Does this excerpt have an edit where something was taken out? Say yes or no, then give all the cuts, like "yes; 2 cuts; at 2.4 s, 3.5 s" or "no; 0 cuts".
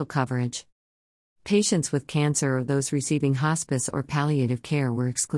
no; 0 cuts